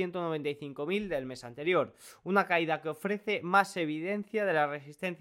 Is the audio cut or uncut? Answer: uncut